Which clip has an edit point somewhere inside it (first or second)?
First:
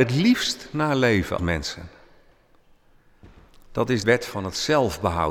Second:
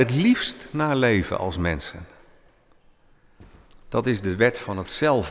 first